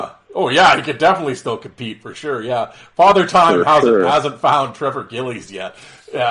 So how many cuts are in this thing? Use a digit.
0